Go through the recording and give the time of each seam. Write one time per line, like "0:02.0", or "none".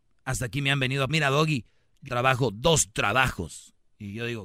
0:01.1
0:02.1